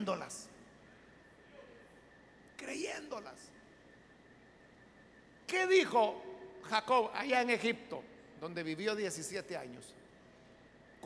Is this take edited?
no; 0 cuts

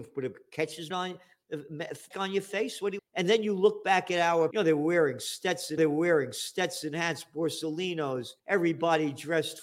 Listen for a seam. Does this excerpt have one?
yes; 6 cuts; at 0.9 s, 2.1 s, 3.0 s, 4.5 s, 5.8 s, 8.4 s

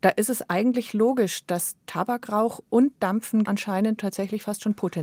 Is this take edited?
yes; 2 cuts; at 3.4 s, 4.0 s

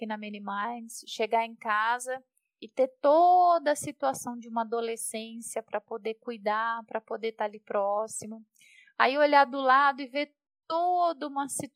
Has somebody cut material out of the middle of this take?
no; 0 cuts

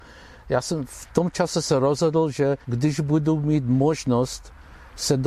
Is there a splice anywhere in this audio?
yes; 1 cut; at 2.6 s

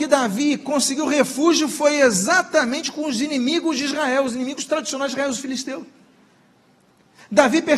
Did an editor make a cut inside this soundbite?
no; 0 cuts

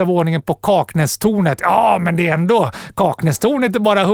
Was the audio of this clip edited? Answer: no; 0 cuts

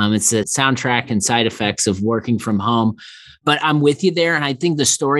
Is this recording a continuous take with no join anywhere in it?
no; 1 cut; at 3.6 s

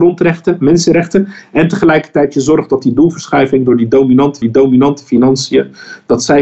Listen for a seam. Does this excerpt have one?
yes; 1 cut; at 4.4 s

